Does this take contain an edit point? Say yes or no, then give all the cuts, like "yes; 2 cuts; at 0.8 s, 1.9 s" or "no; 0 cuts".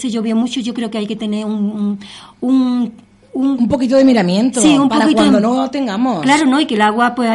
no; 0 cuts